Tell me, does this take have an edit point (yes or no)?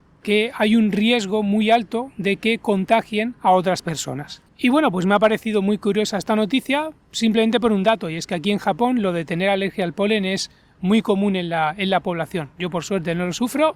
no